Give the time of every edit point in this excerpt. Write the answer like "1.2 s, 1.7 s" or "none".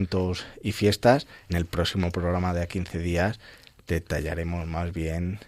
1.5 s, 2.7 s